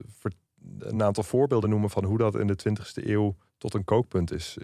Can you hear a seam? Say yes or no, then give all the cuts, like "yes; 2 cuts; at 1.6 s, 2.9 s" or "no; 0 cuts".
no; 0 cuts